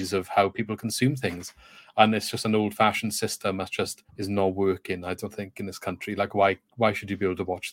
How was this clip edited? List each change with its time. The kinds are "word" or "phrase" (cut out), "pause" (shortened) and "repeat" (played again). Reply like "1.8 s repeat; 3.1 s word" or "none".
4.1 s pause